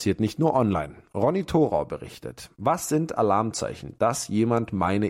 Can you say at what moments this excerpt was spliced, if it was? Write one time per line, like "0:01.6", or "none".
none